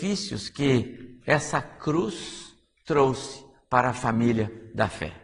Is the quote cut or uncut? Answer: uncut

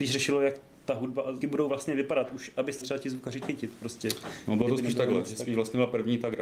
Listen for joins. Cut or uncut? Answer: cut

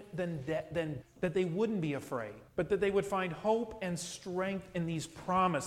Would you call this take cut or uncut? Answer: cut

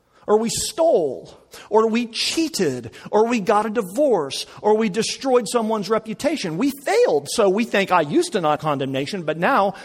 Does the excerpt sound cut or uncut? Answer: cut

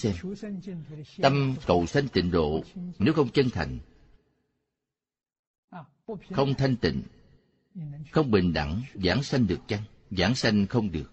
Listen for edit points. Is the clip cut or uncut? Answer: uncut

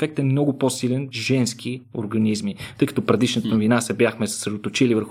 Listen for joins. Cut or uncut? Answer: cut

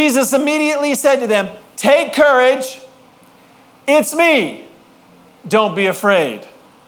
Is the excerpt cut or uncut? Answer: uncut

